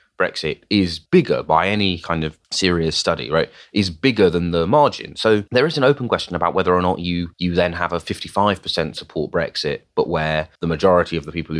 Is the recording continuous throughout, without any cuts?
no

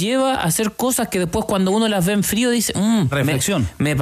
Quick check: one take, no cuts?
no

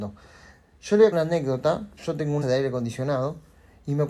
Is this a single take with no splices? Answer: no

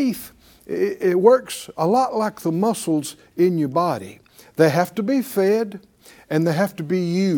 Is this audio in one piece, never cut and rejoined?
yes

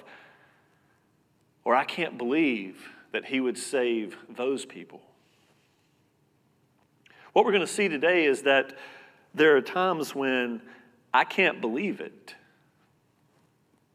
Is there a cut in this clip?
no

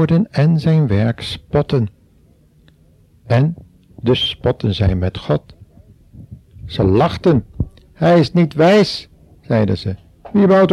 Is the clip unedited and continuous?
yes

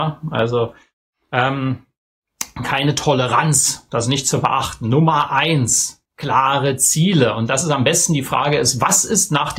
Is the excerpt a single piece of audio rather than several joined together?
no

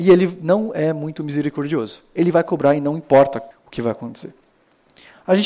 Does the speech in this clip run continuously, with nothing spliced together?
no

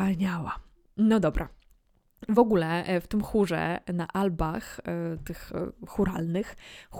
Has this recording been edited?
no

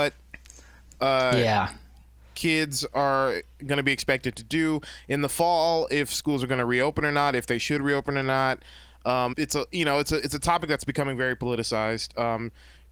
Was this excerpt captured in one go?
no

